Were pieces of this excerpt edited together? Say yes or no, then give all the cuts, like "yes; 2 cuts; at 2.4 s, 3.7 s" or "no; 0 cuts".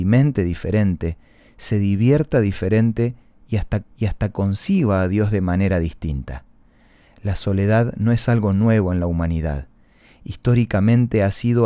yes; 1 cut; at 3.8 s